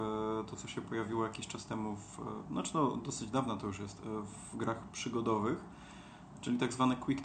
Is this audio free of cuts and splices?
yes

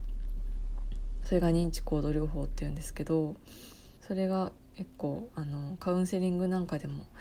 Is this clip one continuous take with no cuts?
no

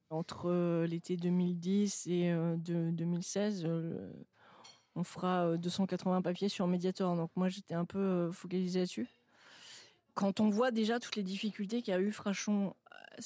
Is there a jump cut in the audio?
no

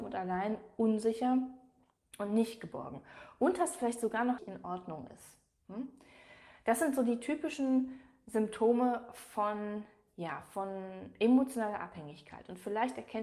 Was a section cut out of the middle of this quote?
yes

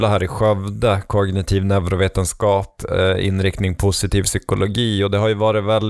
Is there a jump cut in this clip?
no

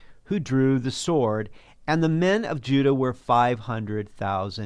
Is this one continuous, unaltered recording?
yes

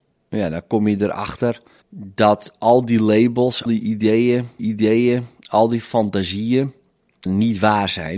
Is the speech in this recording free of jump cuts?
no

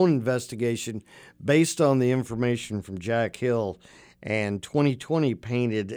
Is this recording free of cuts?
yes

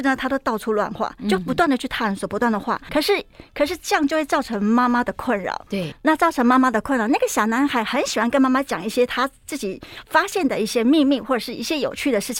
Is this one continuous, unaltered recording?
no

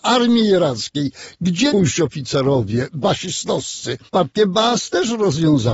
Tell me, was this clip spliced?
yes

